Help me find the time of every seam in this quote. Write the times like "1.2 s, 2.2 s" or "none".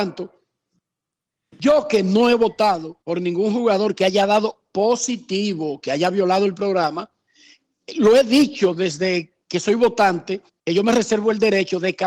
3.0 s, 9.4 s, 10.5 s

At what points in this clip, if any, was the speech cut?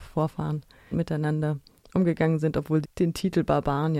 0.9 s, 2.8 s

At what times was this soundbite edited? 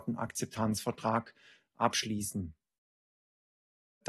none

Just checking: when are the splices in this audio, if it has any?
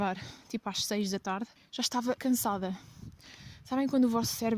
1.6 s, 2.2 s

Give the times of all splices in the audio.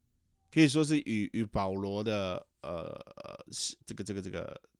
3.8 s

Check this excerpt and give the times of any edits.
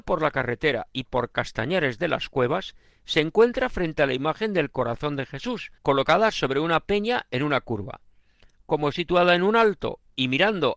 1.0 s, 5.8 s, 8.9 s

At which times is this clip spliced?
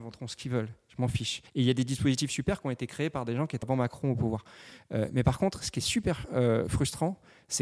1.5 s, 3.6 s

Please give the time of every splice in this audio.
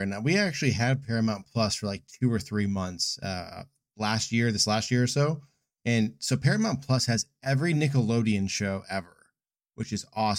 none

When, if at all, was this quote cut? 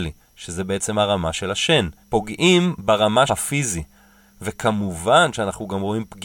2.0 s, 3.3 s

